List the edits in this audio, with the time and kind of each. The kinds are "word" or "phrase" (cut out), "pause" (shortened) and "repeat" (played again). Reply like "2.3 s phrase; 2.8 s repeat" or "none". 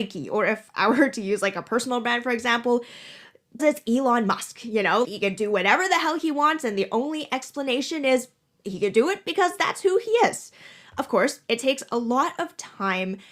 3.6 s word; 5.0 s word